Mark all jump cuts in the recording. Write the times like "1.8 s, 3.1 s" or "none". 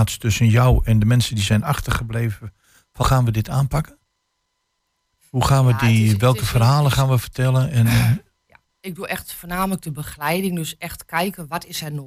3.0 s

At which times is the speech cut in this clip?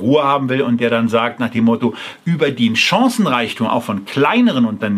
none

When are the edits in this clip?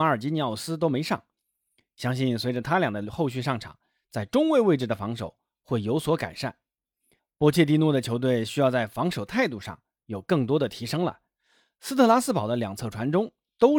none

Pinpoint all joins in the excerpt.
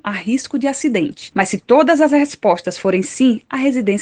none

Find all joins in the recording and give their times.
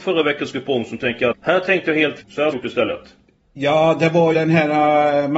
1.3 s, 2.2 s, 2.5 s, 4.3 s

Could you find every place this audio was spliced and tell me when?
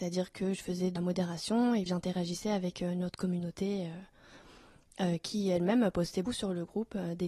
1.0 s, 1.9 s, 6.2 s

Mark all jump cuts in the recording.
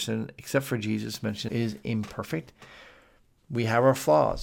1.5 s

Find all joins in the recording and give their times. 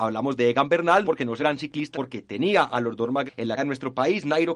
1.0 s, 1.4 s, 1.9 s, 3.3 s, 3.6 s

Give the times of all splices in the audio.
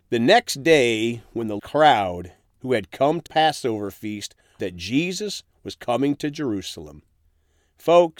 1.6 s, 3.3 s, 4.6 s

